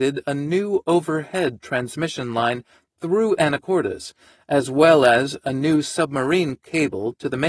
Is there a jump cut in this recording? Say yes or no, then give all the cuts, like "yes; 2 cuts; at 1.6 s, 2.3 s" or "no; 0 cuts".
no; 0 cuts